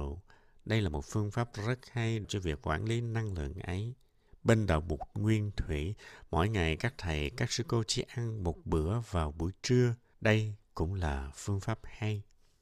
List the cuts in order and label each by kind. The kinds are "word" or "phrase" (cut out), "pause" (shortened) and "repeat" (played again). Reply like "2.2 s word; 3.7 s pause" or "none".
2.2 s phrase; 4.3 s pause; 10.1 s pause